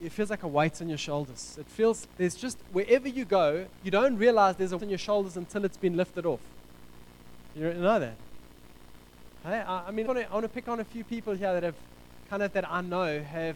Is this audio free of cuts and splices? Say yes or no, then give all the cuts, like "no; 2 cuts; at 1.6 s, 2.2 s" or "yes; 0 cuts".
no; 4 cuts; at 2.0 s, 3.8 s, 4.8 s, 10.0 s